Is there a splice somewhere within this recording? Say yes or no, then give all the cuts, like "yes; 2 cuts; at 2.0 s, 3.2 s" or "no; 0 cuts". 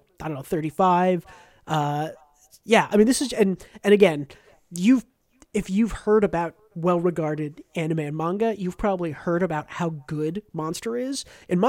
no; 0 cuts